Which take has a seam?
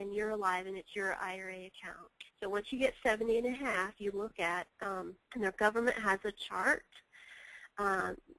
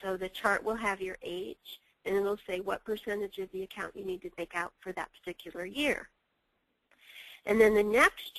first; 2 cuts; at 2.3 s, 5.2 s

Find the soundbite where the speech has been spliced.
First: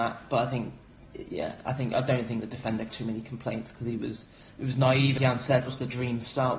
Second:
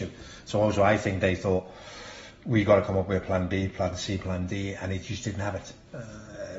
first; 4 cuts; at 2.9 s, 4.4 s, 5.2 s, 5.7 s

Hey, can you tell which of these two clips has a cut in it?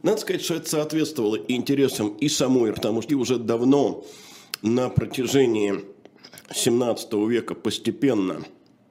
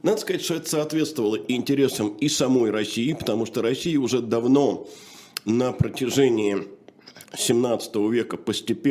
first; 2 cuts; at 2.7 s, 3.1 s

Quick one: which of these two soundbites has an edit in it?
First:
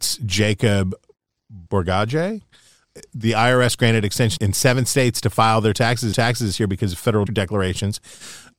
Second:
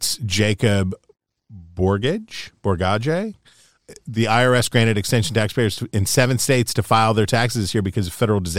first; 4 cuts; at 1.7 s, 4.4 s, 6.1 s, 7.3 s

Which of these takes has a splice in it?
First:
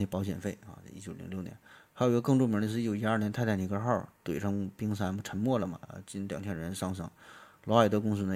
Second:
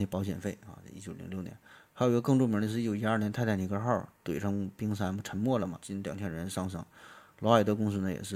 second; 1 cut; at 5.8 s

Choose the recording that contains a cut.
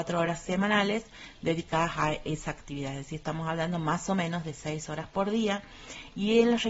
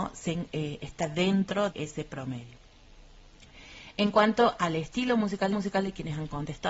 second; 2 cuts; at 1.7 s, 5.5 s

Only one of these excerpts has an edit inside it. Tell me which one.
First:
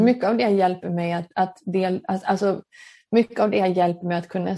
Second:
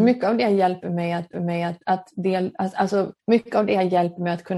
second; 2 cuts; at 1.3 s, 3.2 s

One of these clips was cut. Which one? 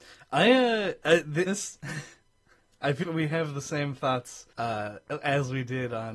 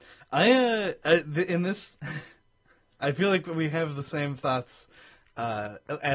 first; 3 cuts; at 1.5 s, 3.0 s, 4.5 s

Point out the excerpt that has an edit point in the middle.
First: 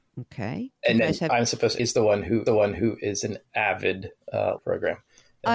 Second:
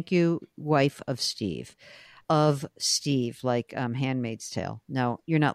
first; 4 cuts; at 1.3 s, 1.8 s, 2.5 s, 4.6 s

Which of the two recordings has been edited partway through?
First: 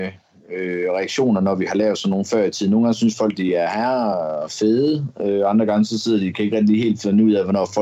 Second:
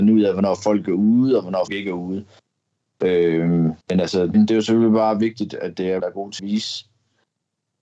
second; 5 cuts; at 1.7 s, 3.8 s, 4.3 s, 6.0 s, 6.4 s

